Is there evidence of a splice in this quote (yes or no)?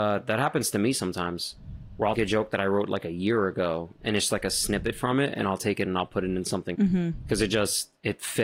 yes